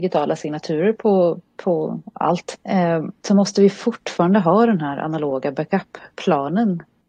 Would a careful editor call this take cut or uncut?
cut